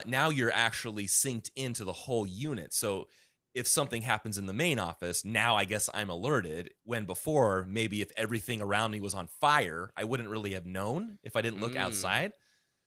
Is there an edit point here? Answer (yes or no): no